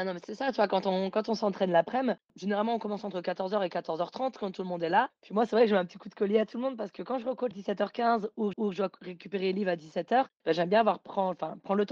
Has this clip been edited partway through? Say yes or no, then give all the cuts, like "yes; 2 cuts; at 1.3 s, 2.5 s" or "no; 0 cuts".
yes; 2 cuts; at 7.5 s, 8.5 s